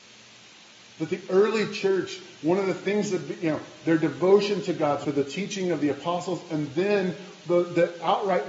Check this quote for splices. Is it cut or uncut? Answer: cut